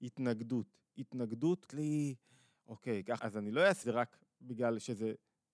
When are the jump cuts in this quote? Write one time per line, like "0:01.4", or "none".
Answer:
0:01.7
0:03.2
0:03.8

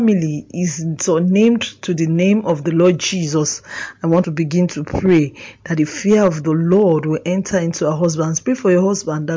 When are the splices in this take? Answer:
0:04.2

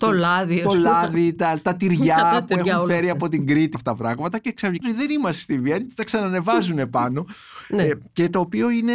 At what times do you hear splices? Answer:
0:03.7
0:04.8

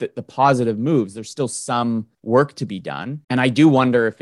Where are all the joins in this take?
0:02.1
0:03.2

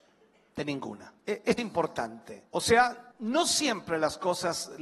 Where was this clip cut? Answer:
0:01.2
0:01.6
0:02.5
0:03.1

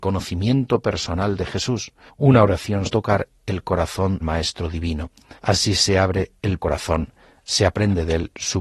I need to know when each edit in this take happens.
0:02.1
0:02.9
0:04.2
0:05.4
0:06.6

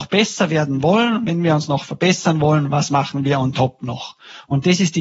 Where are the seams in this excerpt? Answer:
none

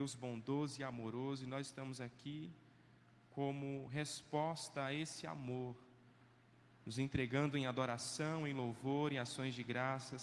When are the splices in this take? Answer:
none

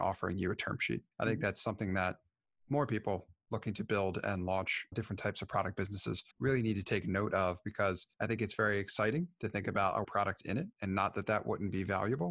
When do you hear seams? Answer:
0:01.1
0:04.9
0:06.3
0:08.1
0:10.0
0:10.7

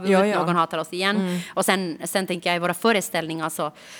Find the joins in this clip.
none

